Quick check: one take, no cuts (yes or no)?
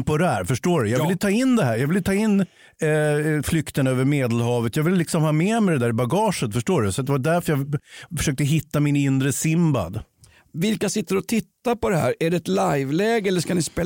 yes